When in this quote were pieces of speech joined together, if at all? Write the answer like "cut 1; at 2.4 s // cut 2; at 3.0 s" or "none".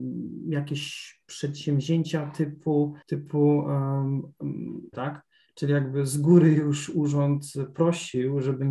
cut 1; at 3.0 s // cut 2; at 4.9 s